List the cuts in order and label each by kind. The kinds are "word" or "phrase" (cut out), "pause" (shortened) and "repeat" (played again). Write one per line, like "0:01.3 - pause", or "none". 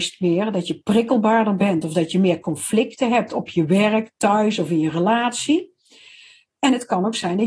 none